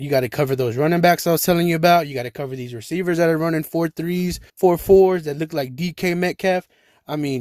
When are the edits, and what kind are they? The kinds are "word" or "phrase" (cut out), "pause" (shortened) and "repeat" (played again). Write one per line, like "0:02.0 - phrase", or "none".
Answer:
0:04.5 - pause